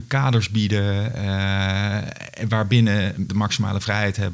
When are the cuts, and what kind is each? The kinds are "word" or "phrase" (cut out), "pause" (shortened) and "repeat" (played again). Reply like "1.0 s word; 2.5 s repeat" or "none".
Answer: 3.3 s word